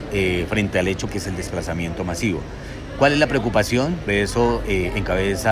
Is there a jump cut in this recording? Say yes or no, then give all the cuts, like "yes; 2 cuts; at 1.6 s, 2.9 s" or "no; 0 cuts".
yes; 2 cuts; at 1.1 s, 4.1 s